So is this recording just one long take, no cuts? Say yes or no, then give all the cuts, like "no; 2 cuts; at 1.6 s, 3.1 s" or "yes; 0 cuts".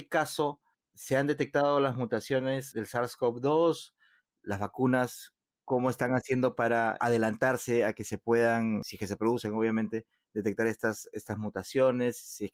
yes; 0 cuts